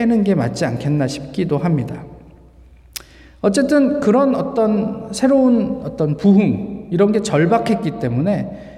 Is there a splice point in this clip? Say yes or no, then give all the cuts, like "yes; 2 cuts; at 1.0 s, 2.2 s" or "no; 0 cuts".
no; 0 cuts